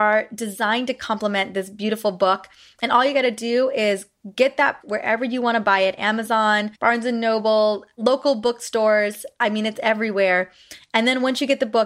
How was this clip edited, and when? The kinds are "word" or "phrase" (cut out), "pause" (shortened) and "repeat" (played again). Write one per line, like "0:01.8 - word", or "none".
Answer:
0:04.8 - word
0:06.7 - pause